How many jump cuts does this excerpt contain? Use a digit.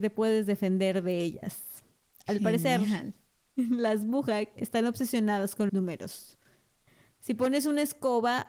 1